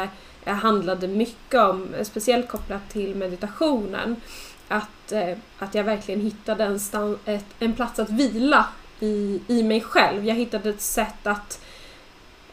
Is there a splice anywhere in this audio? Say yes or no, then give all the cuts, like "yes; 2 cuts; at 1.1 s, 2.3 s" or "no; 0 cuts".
no; 0 cuts